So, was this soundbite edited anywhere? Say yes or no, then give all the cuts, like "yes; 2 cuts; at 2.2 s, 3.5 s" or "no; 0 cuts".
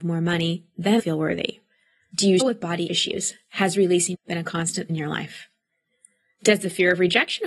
yes; 5 cuts; at 1.0 s, 2.4 s, 2.9 s, 4.1 s, 4.9 s